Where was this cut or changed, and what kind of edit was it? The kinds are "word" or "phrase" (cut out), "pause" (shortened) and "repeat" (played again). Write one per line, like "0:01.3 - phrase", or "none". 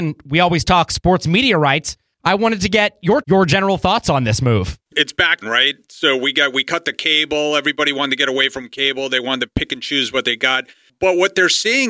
0:03.2 - word
0:04.9 - pause
0:05.4 - phrase